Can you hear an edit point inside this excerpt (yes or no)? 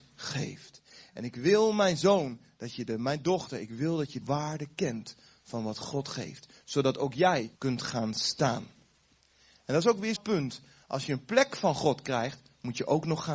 yes